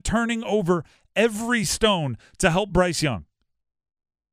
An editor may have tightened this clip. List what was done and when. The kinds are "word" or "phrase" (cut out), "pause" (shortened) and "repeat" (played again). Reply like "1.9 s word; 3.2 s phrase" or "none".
none